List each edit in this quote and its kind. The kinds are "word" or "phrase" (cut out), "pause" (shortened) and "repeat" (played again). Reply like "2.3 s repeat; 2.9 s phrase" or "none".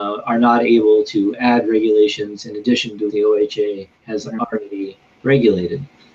3.1 s word; 4.0 s pause